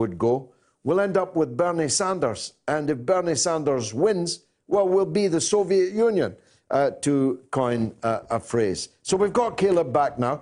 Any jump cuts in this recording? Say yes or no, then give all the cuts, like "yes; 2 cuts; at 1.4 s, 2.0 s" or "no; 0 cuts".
no; 0 cuts